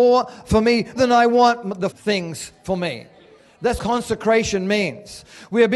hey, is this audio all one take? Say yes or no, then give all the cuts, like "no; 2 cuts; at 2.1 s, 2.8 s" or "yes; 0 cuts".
no; 3 cuts; at 1.0 s, 1.9 s, 3.8 s